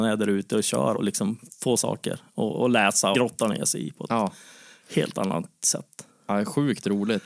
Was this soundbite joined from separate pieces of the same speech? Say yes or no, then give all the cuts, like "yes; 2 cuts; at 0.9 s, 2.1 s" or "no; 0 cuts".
yes; 3 cuts; at 0.9 s, 1.8 s, 3.1 s